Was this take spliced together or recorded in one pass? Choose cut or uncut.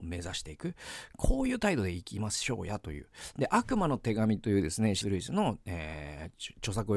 cut